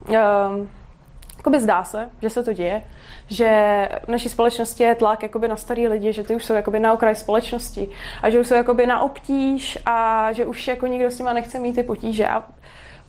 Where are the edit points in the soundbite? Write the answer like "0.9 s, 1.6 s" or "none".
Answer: none